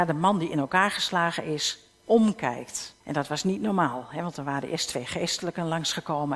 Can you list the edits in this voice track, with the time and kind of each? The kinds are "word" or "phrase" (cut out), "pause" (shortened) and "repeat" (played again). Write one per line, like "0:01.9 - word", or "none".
0:03.0 - pause